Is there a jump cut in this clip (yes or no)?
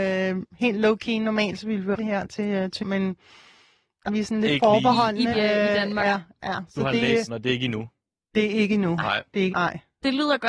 yes